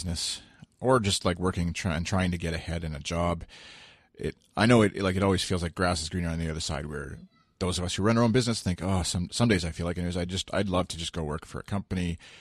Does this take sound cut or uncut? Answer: uncut